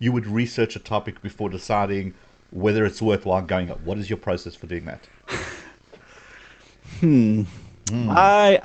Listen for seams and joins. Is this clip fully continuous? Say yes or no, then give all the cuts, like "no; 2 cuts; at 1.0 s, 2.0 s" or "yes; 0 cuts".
no; 1 cut; at 3.7 s